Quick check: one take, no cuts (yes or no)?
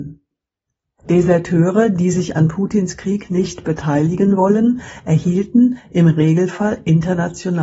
yes